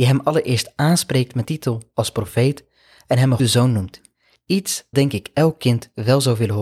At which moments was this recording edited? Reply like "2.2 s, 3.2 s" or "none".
1.4 s, 3.4 s, 4.9 s